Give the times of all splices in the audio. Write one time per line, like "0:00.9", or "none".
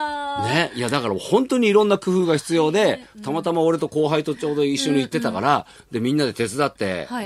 none